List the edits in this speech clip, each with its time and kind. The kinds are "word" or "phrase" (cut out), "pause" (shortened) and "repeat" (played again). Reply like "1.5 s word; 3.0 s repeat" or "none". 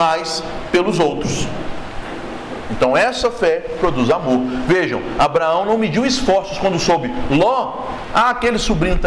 none